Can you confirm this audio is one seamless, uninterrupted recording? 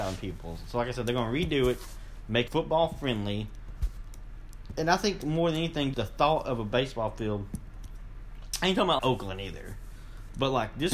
no; 3 cuts; at 2.5 s, 5.9 s, 9.0 s

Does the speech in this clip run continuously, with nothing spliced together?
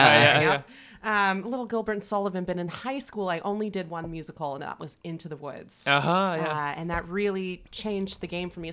yes; 0 cuts

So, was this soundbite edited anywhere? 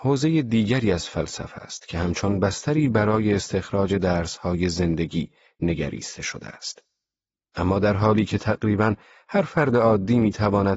no; 0 cuts

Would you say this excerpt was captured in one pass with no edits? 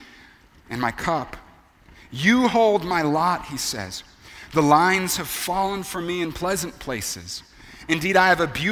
yes; 0 cuts

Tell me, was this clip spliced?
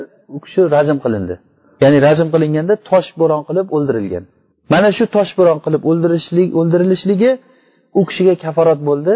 no; 0 cuts

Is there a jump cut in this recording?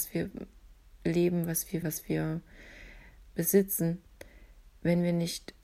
yes; 2 cuts; at 1.8 s, 3.3 s

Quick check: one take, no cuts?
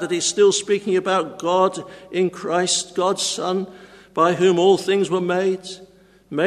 yes; 0 cuts

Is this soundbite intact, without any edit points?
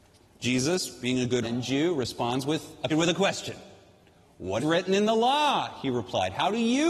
no; 3 cuts; at 1.4 s, 2.9 s, 4.6 s

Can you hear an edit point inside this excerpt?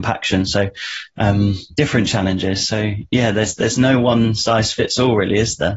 no; 0 cuts

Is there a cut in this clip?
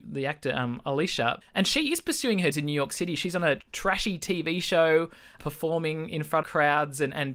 yes; 5 cuts; at 1.4 s, 2.5 s, 3.6 s, 5.4 s, 6.4 s

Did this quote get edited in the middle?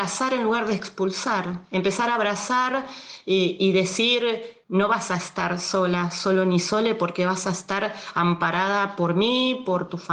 yes; 1 cut; at 4.6 s

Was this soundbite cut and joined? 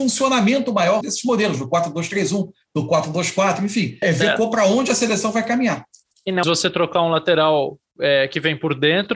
yes; 3 cuts; at 1.0 s, 4.0 s, 6.4 s

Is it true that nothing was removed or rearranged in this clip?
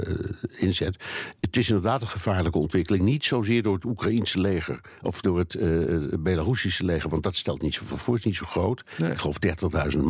yes; 0 cuts

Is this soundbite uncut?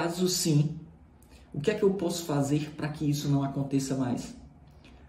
yes; 0 cuts

